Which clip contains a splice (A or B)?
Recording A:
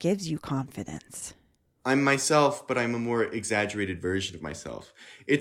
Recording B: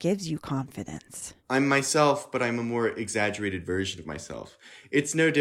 B